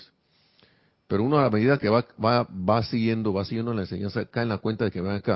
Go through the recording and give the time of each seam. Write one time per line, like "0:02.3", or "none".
none